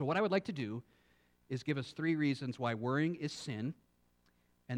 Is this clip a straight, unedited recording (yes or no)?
yes